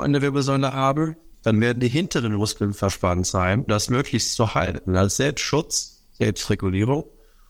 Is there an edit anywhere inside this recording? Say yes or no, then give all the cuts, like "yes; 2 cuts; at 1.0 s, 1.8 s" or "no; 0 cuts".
yes; 1 cut; at 3.7 s